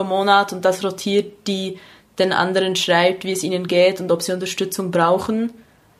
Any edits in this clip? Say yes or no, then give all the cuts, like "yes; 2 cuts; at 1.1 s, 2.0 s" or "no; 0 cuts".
no; 0 cuts